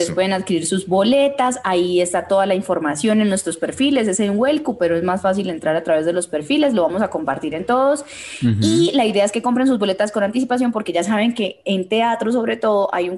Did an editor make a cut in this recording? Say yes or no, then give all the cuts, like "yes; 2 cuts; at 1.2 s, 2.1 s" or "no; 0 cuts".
no; 0 cuts